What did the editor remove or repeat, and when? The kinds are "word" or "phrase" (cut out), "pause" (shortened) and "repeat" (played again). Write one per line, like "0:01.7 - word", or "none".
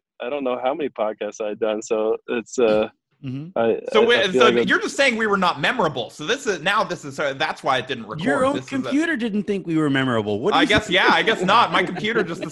none